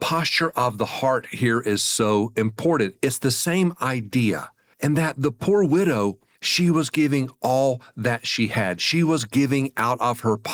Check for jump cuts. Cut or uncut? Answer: uncut